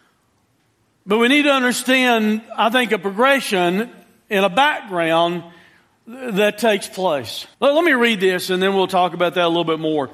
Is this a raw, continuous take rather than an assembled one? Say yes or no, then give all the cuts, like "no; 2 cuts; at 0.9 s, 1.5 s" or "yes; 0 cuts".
no; 1 cut; at 7.5 s